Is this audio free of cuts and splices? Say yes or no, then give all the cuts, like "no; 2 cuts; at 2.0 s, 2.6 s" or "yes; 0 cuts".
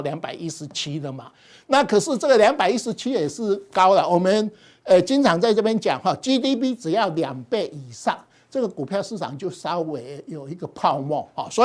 yes; 0 cuts